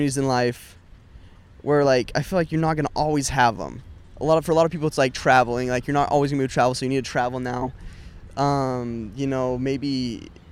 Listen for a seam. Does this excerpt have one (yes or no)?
no